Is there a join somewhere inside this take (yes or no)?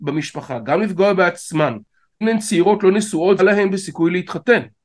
yes